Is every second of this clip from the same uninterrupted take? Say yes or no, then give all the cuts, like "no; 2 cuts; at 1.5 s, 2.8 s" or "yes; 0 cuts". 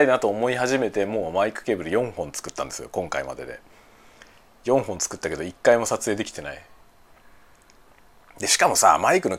yes; 0 cuts